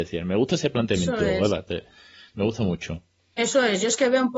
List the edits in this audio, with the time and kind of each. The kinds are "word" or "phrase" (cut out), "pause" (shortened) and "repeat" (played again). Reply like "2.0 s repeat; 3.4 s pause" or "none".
none